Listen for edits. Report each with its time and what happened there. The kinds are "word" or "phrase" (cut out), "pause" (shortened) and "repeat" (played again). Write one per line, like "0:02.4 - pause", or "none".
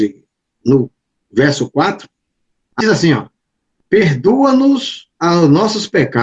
0:02.8 - phrase
0:05.1 - pause